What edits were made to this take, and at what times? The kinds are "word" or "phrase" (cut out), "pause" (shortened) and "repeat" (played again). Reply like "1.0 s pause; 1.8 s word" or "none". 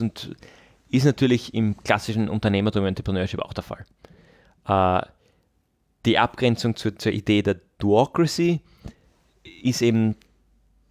none